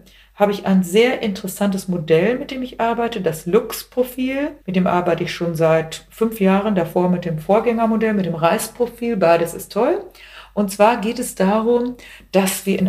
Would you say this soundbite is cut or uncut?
cut